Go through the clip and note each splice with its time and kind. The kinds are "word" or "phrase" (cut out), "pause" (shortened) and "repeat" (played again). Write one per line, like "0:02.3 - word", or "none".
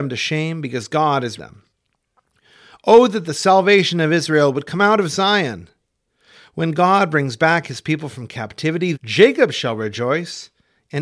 0:01.4 - word
0:08.9 - word